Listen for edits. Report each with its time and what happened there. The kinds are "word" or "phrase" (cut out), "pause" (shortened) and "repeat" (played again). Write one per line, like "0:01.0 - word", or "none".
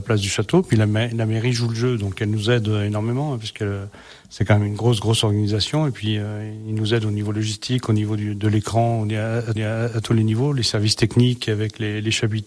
0:09.6 - repeat